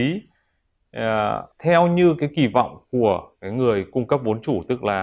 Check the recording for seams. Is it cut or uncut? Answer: cut